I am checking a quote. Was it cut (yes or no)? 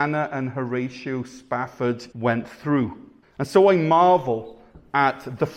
yes